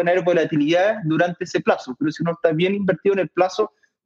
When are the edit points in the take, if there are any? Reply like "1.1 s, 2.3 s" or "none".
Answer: none